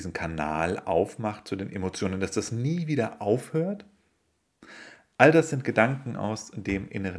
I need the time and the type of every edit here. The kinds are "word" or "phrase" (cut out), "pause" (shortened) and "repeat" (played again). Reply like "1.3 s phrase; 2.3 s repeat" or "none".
none